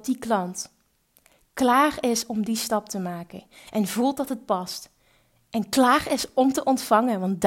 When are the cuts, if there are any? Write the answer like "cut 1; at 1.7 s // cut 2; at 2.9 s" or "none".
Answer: none